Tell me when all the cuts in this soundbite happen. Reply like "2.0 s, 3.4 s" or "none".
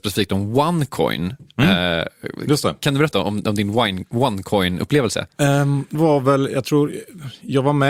3.1 s, 5.9 s